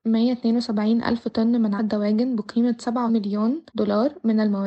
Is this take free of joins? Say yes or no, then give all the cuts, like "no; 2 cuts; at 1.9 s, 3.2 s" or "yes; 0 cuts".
no; 3 cuts; at 1.8 s, 3.1 s, 3.7 s